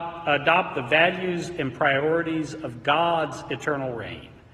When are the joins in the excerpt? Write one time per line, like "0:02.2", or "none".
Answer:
none